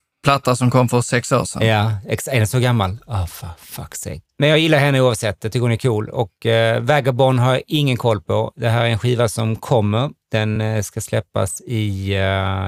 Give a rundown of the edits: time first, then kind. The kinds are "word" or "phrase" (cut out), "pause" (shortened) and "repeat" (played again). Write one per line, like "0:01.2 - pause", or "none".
none

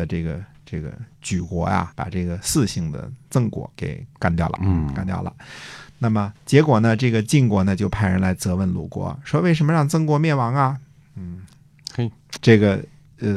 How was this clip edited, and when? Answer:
0:01.1 - pause
0:01.9 - word
0:03.7 - pause
0:04.6 - phrase
0:06.4 - pause
0:12.4 - phrase

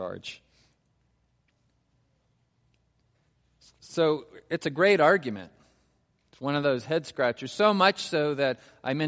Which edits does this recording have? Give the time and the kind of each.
none

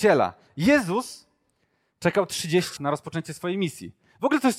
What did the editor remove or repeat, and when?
0:02.8 - word

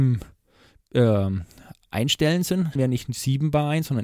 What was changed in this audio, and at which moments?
0:02.8 - word

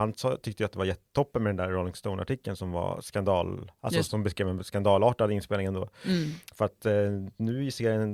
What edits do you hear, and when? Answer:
0:04.1 - word

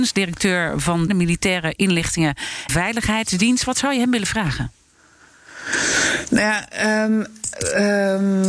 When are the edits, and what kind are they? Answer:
0:01.1 - phrase
0:02.7 - word

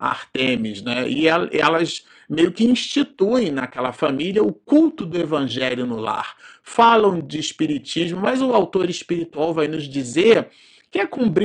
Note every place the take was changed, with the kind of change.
none

